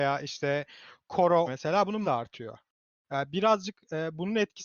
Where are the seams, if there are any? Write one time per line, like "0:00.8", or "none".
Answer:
0:01.5
0:02.0